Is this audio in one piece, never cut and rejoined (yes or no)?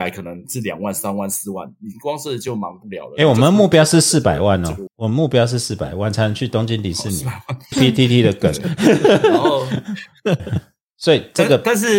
no